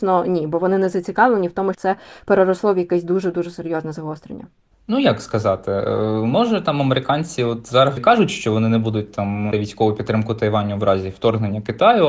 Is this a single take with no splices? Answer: no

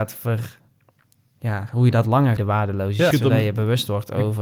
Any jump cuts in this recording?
yes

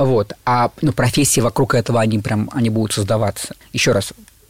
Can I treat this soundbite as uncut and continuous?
yes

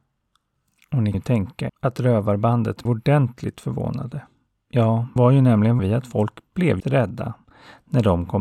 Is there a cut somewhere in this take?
yes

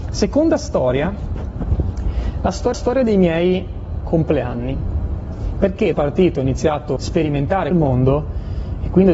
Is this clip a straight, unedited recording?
no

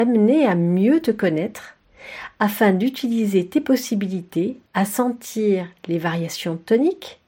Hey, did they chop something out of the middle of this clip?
yes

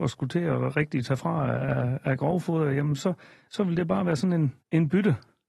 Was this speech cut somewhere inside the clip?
no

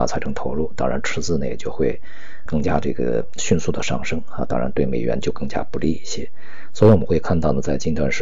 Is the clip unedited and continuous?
no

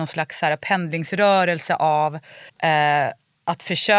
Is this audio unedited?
no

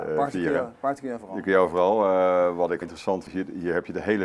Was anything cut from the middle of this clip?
yes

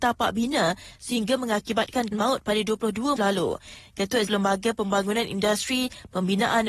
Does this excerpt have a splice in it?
yes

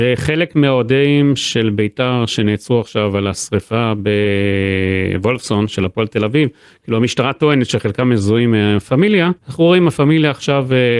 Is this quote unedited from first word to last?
no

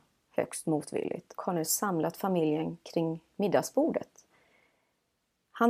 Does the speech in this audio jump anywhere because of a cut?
yes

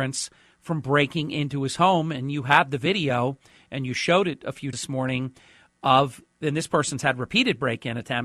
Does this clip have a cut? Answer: yes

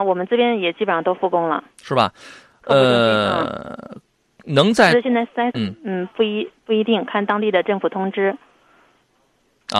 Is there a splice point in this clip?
yes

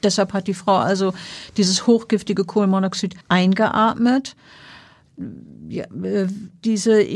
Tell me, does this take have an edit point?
yes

